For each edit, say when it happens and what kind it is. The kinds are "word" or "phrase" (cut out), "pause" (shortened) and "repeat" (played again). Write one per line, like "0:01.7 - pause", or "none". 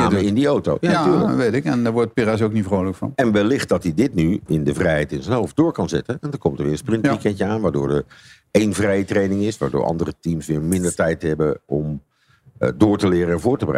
none